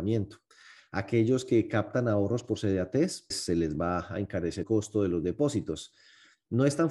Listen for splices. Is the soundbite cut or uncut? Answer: cut